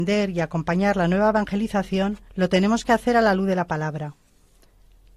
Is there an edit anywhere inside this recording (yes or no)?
yes